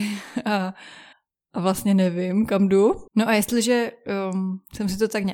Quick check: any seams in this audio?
yes; 2 cuts; at 1.1 s, 3.1 s

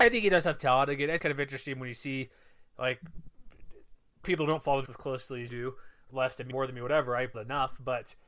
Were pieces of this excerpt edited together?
yes; 7 cuts; at 1.2 s, 4.2 s, 4.9 s, 5.5 s, 6.1 s, 6.5 s, 7.3 s

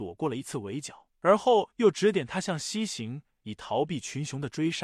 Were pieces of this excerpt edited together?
no; 0 cuts

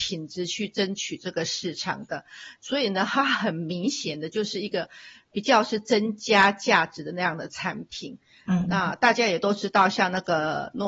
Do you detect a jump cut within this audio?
no; 0 cuts

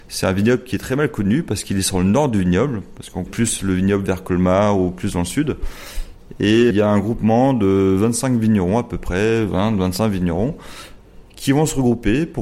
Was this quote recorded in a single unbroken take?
no; 2 cuts; at 3.3 s, 6.7 s

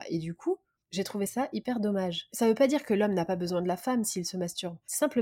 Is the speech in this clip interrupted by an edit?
no; 0 cuts

